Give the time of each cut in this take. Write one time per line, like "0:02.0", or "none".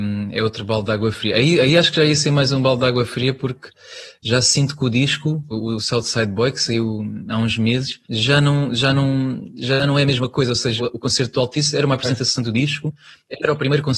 0:05.5
0:08.0
0:10.8